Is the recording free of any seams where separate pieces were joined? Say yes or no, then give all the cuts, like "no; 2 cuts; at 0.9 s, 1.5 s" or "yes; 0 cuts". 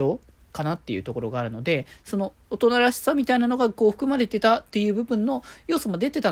yes; 0 cuts